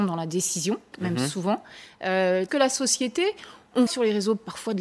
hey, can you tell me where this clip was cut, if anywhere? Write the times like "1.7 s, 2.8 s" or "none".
0.9 s, 2.5 s, 3.9 s